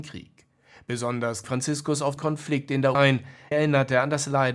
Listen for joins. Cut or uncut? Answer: cut